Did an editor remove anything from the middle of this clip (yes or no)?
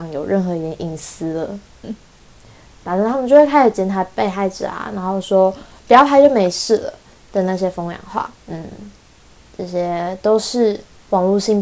yes